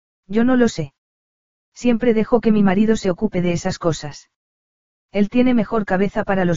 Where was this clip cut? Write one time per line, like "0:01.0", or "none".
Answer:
none